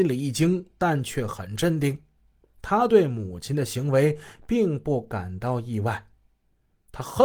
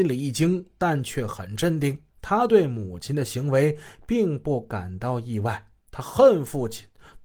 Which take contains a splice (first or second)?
second